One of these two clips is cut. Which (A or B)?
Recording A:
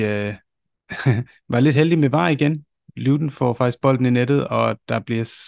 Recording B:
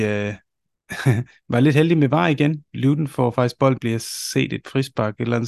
B